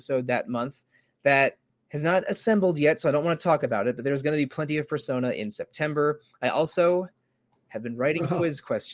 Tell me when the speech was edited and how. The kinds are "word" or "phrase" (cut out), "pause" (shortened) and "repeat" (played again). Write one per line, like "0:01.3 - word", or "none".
0:01.7 - pause